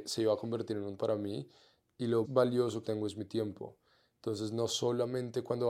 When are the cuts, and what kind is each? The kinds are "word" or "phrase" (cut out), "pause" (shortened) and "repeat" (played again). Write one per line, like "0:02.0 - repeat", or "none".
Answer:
0:01.0 - word
0:02.2 - word
0:02.8 - word